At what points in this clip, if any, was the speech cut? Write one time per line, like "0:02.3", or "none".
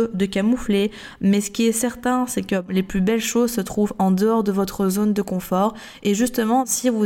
none